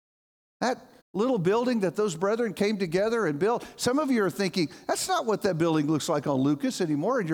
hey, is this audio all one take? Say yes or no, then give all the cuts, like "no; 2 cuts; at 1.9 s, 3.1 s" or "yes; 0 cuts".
yes; 0 cuts